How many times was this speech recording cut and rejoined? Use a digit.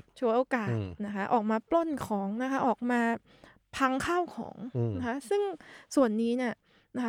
0